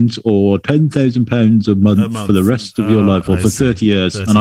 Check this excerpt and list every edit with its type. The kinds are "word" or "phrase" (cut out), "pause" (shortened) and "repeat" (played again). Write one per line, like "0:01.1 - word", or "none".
none